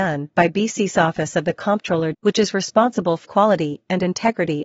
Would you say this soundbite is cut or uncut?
cut